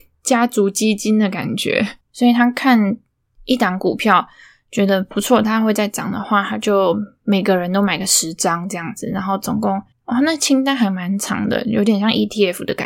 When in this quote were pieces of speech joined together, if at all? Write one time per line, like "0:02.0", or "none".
0:02.0
0:09.9

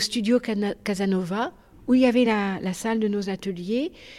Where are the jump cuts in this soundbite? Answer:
none

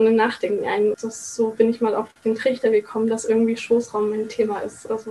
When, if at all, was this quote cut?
0:00.9

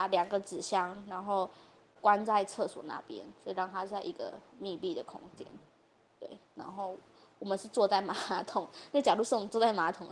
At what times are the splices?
0:01.9

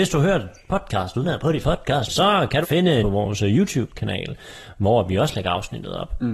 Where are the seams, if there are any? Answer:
0:01.2
0:01.6
0:02.1
0:02.6
0:03.0

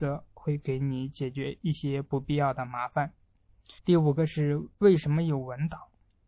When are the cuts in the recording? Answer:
0:03.8
0:04.7

